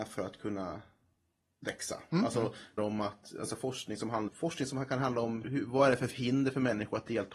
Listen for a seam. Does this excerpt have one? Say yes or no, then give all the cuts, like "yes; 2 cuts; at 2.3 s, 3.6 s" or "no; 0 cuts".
yes; 3 cuts; at 2.8 s, 4.3 s, 5.4 s